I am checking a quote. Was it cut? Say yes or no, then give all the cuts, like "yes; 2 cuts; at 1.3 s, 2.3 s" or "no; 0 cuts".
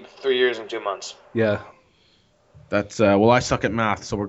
no; 0 cuts